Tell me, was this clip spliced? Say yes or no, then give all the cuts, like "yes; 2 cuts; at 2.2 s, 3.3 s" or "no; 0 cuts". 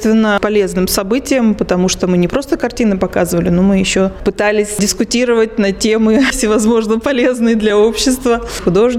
no; 0 cuts